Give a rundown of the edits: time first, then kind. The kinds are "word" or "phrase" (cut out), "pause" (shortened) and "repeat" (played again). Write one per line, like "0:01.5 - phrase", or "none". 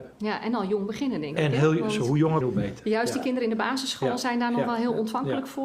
0:02.4 - word